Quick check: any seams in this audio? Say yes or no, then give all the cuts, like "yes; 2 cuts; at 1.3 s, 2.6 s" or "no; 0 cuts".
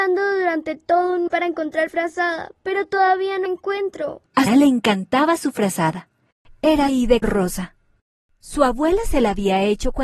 yes; 6 cuts; at 1.3 s, 1.9 s, 3.5 s, 4.5 s, 6.9 s, 7.2 s